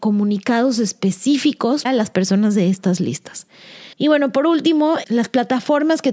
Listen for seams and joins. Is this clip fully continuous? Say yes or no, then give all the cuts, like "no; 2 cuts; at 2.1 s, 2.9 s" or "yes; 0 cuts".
no; 3 cuts; at 1.9 s, 3.9 s, 5.0 s